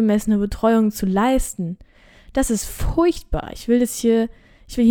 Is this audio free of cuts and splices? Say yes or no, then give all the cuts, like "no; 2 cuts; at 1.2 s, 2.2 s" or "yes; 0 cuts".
yes; 0 cuts